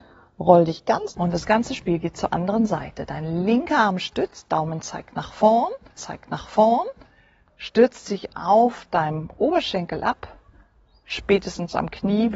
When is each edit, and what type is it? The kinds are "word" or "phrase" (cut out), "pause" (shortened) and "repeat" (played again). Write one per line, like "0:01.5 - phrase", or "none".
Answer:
0:01.1 - phrase
0:06.0 - repeat